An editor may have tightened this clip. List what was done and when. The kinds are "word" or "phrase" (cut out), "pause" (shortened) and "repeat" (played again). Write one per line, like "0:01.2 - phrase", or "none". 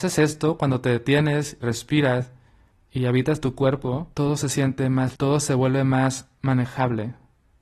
0:01.6 - word
0:02.7 - pause
0:04.1 - pause
0:05.1 - word

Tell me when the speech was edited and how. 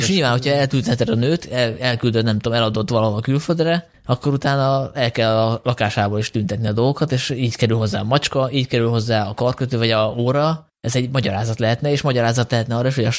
none

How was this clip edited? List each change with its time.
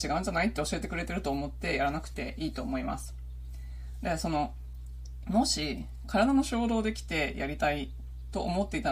0:05.2 - word

